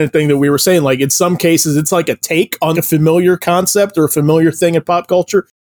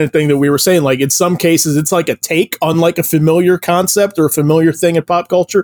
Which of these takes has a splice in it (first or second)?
first